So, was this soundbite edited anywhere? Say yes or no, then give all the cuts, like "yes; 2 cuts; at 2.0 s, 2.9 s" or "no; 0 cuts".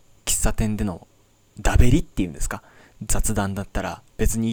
no; 0 cuts